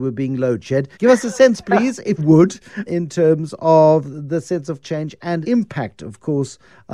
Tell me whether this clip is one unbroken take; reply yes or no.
no